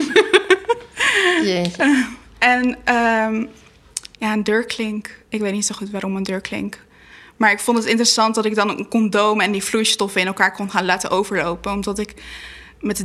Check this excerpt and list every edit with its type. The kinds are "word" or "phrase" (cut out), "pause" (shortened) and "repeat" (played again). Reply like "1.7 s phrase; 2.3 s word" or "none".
4.1 s pause; 5.2 s pause